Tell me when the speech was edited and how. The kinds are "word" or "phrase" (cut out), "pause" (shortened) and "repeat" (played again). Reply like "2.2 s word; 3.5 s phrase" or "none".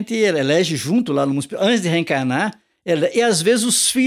none